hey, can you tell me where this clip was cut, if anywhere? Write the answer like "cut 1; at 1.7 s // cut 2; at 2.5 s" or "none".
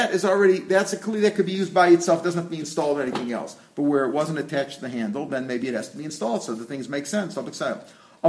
none